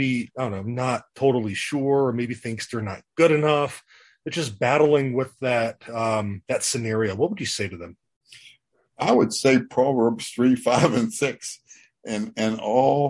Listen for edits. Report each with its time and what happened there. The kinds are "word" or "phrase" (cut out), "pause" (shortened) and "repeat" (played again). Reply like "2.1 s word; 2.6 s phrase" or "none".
none